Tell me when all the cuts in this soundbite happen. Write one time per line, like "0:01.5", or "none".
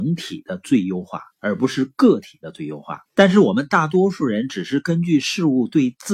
0:01.3
0:03.1